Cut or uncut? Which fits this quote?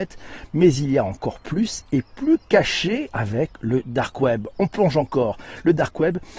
uncut